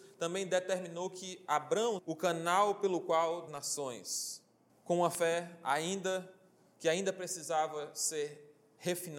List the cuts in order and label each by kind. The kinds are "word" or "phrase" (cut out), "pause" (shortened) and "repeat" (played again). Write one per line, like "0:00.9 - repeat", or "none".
0:02.0 - word
0:03.5 - phrase
0:04.7 - pause